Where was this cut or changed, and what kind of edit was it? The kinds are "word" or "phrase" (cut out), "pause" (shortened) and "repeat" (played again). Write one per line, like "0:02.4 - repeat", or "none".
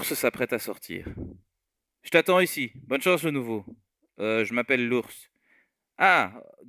none